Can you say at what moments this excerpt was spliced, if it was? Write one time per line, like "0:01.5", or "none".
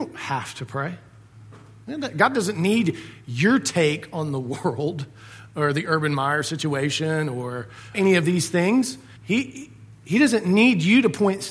0:07.9
0:09.2